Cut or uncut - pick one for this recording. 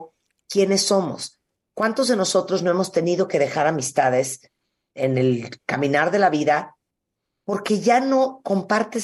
uncut